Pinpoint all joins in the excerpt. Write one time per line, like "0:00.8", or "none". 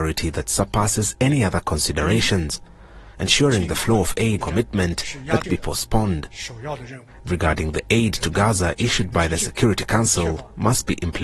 0:03.1
0:04.4
0:05.4
0:07.3